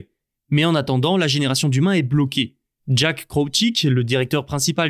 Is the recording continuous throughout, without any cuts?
yes; 0 cuts

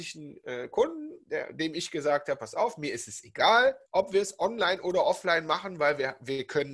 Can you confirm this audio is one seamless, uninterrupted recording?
no; 1 cut; at 3.9 s

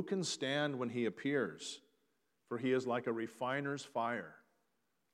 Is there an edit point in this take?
no; 0 cuts

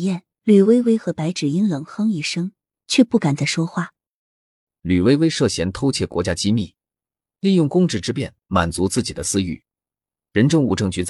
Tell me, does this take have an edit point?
no; 0 cuts

